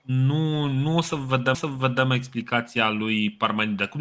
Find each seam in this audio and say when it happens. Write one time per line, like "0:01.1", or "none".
0:01.5